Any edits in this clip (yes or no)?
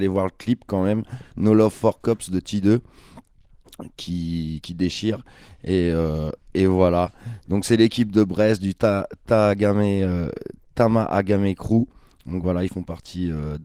no